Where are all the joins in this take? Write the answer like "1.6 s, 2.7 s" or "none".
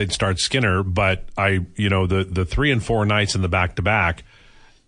none